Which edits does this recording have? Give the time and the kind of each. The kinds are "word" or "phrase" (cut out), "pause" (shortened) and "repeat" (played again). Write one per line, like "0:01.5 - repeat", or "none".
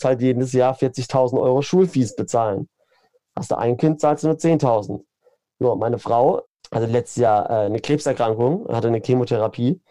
none